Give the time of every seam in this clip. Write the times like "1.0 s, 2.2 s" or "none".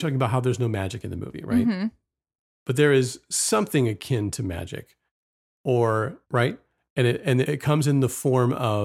6.2 s, 7.4 s